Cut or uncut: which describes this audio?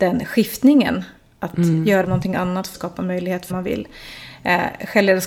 cut